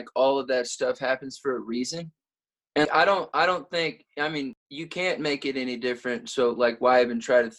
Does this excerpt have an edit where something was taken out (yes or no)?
yes